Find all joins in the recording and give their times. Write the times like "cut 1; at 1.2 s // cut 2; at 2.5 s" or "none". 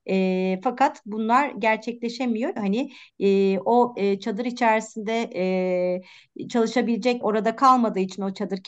cut 1; at 2.6 s // cut 2; at 3.9 s // cut 3; at 7.2 s

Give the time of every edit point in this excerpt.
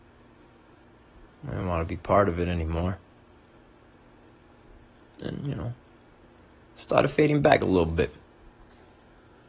none

